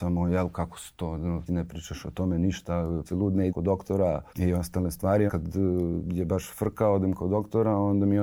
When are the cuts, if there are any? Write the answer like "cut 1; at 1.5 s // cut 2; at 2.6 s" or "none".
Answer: cut 1; at 1.5 s // cut 2; at 3.1 s // cut 3; at 3.5 s // cut 4; at 4.3 s // cut 5; at 5.3 s